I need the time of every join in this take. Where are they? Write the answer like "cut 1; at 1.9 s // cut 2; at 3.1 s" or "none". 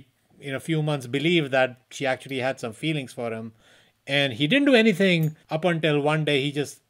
cut 1; at 5.4 s